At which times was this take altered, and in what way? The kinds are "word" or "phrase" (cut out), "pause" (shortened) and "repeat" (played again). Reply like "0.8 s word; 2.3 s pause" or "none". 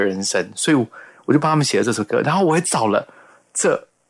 none